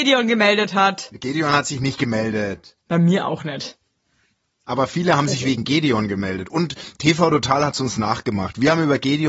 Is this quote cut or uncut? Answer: uncut